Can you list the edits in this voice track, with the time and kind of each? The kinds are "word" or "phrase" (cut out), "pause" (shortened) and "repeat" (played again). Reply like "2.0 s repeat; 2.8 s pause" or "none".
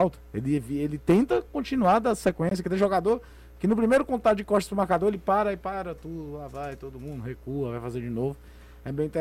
none